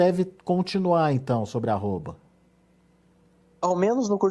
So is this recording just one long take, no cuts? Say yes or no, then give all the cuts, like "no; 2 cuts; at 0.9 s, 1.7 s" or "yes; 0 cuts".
yes; 0 cuts